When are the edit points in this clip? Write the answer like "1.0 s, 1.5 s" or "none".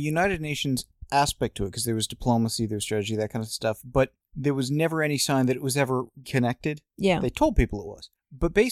6.2 s, 6.9 s

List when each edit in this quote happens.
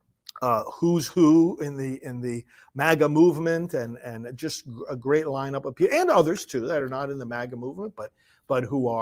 none

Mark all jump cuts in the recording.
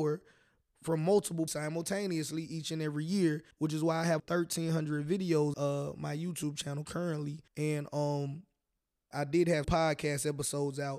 1.5 s, 3.5 s, 4.2 s, 5.5 s, 7.5 s, 9.1 s, 9.6 s

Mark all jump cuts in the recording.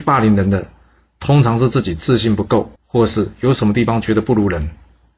2.8 s

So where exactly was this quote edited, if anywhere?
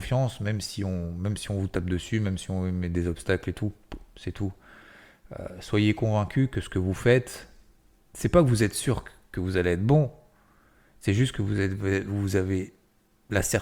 none

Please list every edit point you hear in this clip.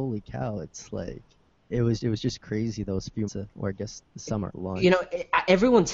1.7 s, 2.0 s, 3.3 s, 4.5 s

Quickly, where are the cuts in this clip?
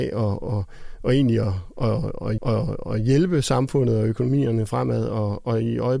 2.4 s

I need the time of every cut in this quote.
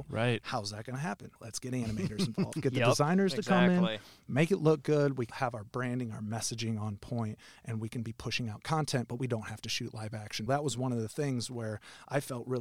1.4 s, 5.3 s, 10.5 s

